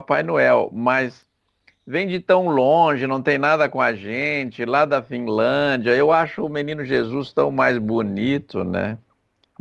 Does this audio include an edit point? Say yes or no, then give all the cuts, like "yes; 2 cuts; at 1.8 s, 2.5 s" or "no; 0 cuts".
no; 0 cuts